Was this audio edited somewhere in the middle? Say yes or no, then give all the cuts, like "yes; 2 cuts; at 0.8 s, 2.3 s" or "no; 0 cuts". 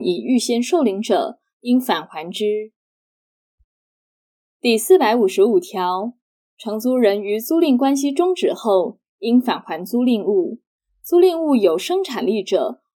no; 0 cuts